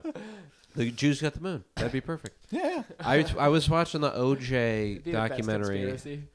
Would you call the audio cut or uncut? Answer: uncut